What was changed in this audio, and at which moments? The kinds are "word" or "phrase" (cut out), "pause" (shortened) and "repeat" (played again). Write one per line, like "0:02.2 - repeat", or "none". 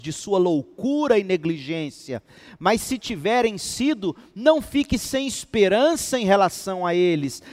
none